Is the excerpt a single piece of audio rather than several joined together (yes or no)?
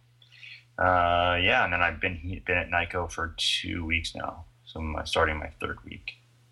yes